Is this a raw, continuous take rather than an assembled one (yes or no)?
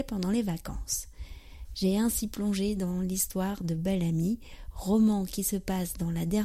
yes